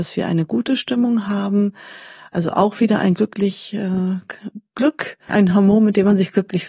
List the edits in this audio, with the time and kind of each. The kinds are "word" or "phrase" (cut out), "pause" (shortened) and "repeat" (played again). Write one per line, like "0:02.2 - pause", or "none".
0:05.3 - phrase